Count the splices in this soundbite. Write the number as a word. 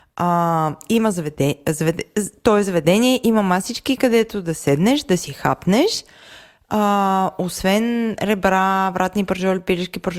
zero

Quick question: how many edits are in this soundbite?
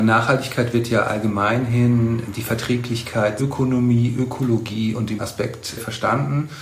two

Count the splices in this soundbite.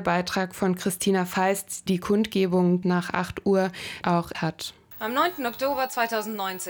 four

